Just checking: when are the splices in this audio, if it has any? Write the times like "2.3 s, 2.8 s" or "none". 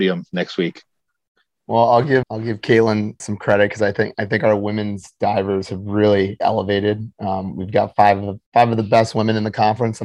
2.2 s, 3.2 s, 6.4 s, 8.5 s